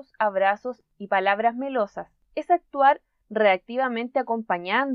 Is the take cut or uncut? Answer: uncut